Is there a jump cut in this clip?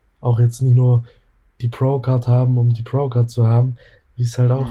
no; 0 cuts

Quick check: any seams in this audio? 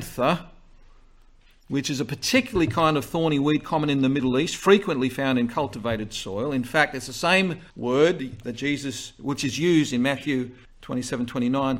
yes; 2 cuts; at 7.7 s, 10.6 s

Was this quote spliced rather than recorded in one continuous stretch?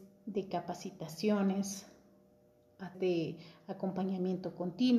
yes; 1 cut; at 2.9 s

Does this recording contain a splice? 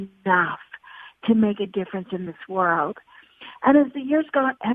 no; 0 cuts

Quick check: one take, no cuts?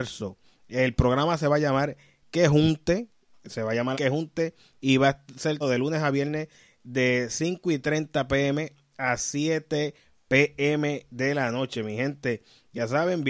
no; 2 cuts; at 3.9 s, 5.6 s

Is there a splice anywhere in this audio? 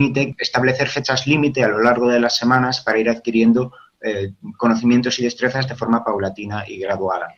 no; 0 cuts

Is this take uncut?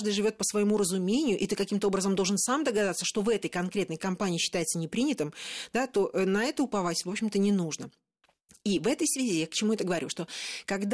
yes; 0 cuts

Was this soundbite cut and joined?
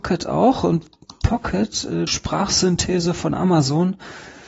yes; 1 cut; at 2.1 s

